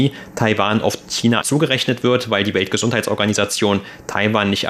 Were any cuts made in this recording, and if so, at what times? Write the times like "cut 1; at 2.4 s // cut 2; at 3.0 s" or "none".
cut 1; at 1.4 s